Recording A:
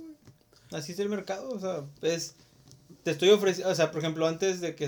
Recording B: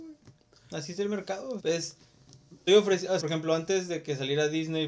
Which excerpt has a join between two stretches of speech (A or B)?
B